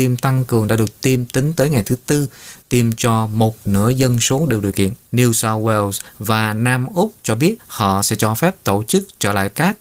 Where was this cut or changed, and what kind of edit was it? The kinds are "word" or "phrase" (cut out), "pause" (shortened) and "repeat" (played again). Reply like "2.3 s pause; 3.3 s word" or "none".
5.0 s pause; 7.6 s pause